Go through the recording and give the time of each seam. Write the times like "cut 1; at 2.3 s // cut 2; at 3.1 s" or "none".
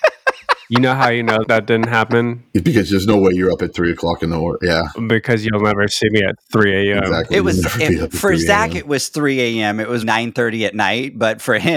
cut 1; at 10.0 s